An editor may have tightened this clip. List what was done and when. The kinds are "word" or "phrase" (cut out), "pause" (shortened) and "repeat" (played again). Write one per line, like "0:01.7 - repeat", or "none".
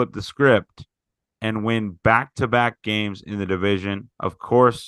none